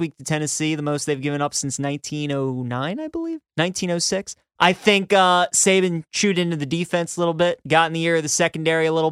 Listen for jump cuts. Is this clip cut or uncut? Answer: cut